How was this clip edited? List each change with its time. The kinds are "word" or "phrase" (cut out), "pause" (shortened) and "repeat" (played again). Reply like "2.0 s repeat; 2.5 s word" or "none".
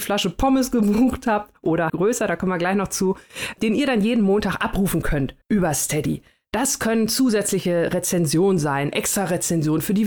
1.9 s word; 5.4 s pause